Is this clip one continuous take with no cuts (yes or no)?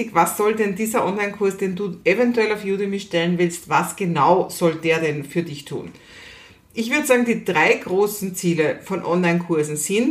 yes